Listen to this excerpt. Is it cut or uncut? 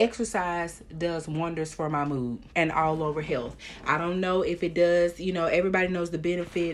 cut